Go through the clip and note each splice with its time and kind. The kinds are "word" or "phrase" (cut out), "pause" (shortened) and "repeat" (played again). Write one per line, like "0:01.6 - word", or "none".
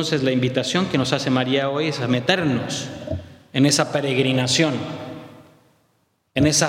none

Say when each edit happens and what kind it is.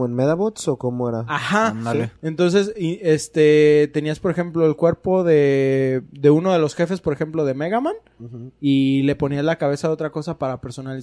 none

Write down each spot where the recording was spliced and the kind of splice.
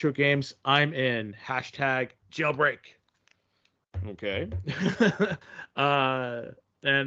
0:05.4 - pause

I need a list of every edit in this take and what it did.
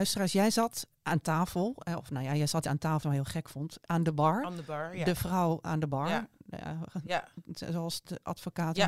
0:01.0 - pause
0:02.6 - word
0:03.0 - phrase
0:03.8 - phrase

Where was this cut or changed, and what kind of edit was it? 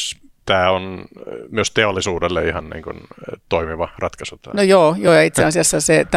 none

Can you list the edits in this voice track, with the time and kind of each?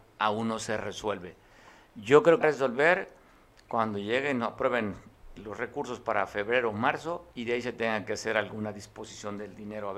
0:02.4 - phrase
0:05.4 - word
0:07.3 - pause

